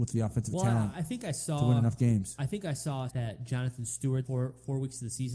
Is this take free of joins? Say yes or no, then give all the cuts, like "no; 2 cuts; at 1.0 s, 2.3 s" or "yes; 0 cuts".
no; 2 cuts; at 3.1 s, 4.3 s